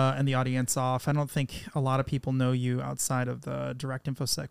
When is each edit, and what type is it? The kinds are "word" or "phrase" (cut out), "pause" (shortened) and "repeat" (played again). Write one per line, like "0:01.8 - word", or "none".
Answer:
none